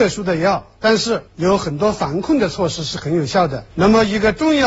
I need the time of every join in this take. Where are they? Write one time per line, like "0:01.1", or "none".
0:01.3
0:03.7